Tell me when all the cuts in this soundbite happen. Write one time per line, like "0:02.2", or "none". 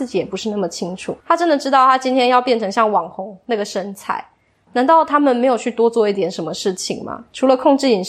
0:01.2

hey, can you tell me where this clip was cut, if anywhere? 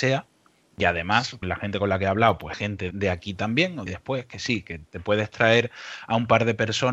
0:01.4
0:02.5
0:02.9
0:03.9

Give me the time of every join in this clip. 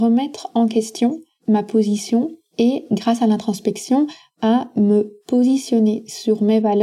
none

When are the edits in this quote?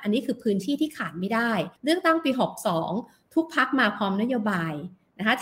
0:01.8

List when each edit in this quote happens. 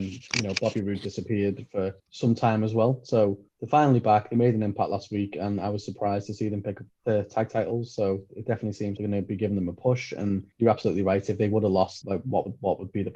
0:02.0
0:03.5
0:06.9
0:09.0
0:10.5
0:12.0

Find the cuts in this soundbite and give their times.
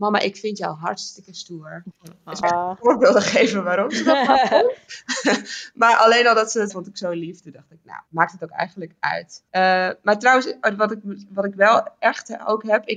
0:02.4
0:06.7
0:08.1
0:09.5

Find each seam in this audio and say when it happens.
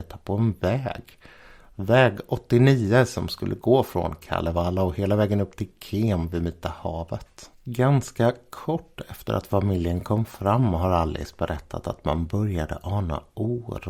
none

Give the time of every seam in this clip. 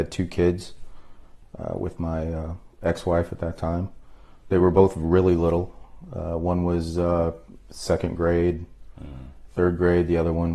0:02.7

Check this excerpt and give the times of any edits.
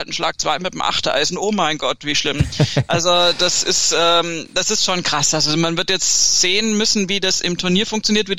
none

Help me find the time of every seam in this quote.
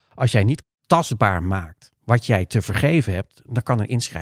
0:02.0

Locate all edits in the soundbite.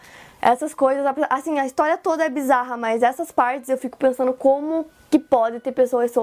none

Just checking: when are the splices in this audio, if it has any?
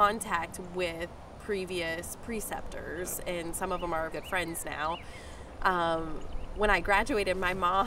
0:01.4
0:04.1

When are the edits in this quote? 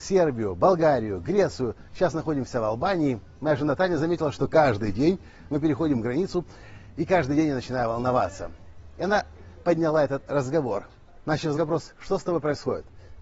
0:11.5

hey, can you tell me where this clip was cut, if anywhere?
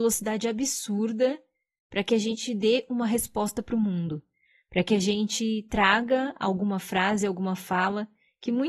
none

